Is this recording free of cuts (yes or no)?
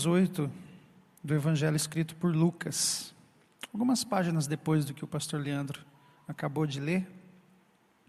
yes